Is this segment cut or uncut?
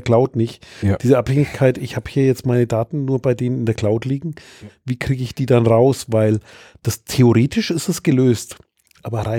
uncut